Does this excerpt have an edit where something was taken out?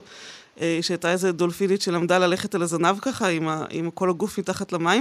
no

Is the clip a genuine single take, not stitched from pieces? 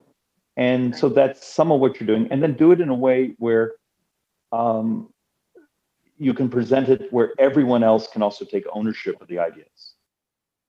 yes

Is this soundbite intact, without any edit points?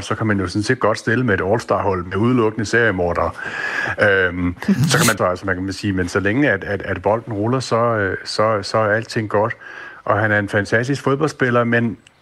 no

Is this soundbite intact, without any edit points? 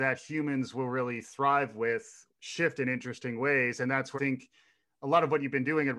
no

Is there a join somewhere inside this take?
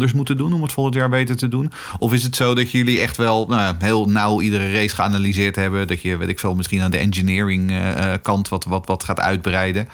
no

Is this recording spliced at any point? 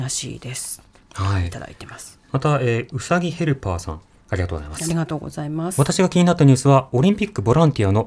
yes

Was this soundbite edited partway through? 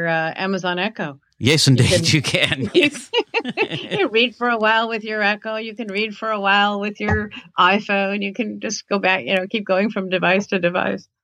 no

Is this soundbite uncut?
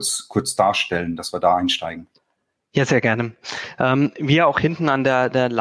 yes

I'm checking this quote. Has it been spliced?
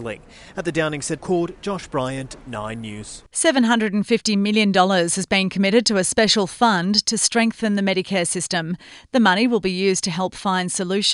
yes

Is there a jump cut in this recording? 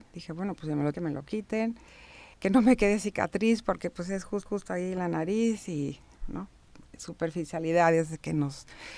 yes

